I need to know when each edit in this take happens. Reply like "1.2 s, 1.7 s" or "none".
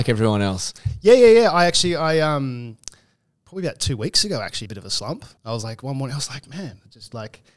4.7 s, 5.4 s